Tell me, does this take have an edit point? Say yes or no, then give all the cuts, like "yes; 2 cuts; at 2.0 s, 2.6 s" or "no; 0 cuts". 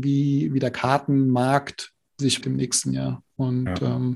yes; 1 cut; at 2.4 s